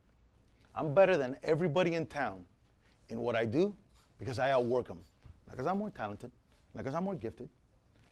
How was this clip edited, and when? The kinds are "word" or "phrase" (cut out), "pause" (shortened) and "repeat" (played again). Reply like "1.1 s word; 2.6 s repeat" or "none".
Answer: none